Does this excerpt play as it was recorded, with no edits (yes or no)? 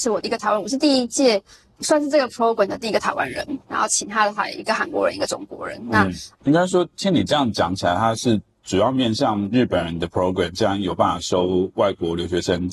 no